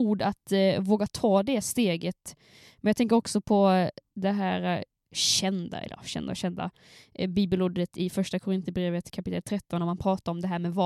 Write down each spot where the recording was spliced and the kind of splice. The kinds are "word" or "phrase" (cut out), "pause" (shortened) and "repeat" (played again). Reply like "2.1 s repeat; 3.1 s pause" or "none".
none